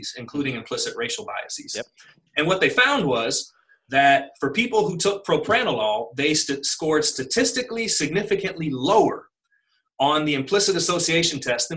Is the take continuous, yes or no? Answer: yes